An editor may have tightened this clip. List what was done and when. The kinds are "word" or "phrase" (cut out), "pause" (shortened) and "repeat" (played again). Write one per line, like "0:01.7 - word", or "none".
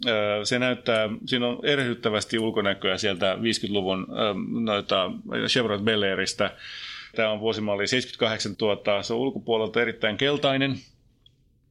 0:07.1 - phrase
0:08.5 - phrase

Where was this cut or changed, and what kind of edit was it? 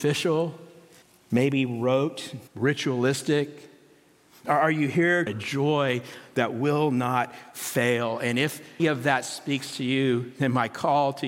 0:01.0 - pause
0:02.5 - pause
0:05.3 - phrase
0:08.8 - word

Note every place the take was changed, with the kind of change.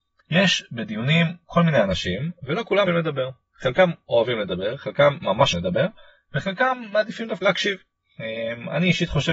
0:02.9 - word
0:05.5 - word
0:07.4 - word

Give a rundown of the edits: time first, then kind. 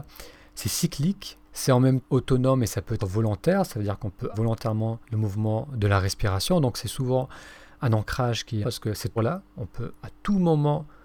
0:01.4 - pause
0:02.0 - word
0:03.0 - word
0:04.3 - word
0:05.0 - pause
0:07.8 - word
0:08.6 - word
0:09.2 - word

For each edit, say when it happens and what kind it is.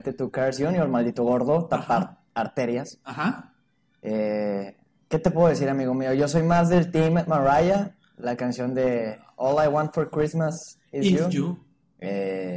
none

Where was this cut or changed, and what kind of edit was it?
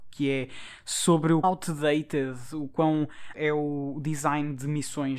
0:01.4 - word
0:03.3 - word

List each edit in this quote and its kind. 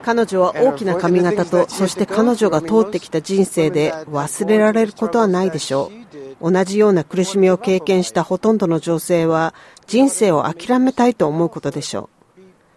none

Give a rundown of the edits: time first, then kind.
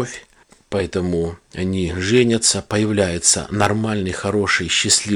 none

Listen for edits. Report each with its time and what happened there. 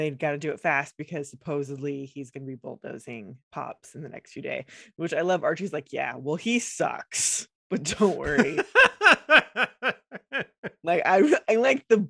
0:03.4 - pause

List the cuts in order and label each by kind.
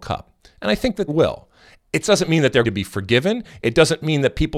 0:01.1 - word
0:02.6 - word

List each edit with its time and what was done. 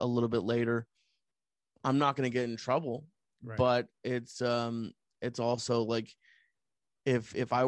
none

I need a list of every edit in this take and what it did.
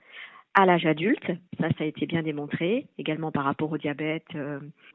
0:01.5 - pause

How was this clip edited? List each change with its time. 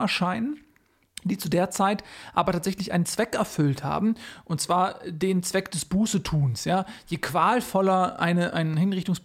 none

